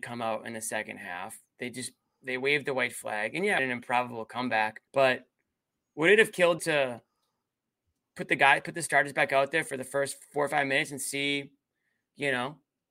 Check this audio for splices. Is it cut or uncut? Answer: cut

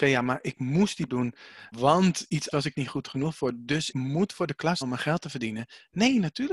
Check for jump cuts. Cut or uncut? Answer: cut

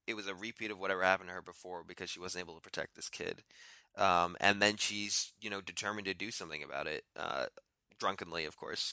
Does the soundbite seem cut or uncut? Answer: uncut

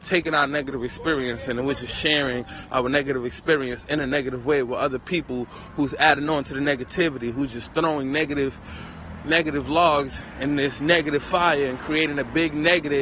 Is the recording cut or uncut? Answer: uncut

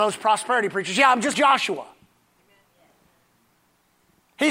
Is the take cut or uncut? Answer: cut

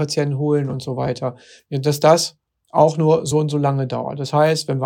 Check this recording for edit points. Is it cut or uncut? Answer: uncut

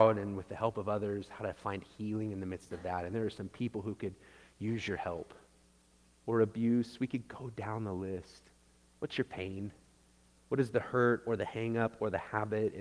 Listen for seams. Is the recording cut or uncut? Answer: uncut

